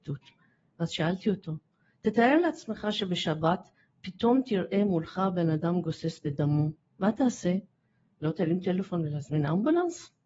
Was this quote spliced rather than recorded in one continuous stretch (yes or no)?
no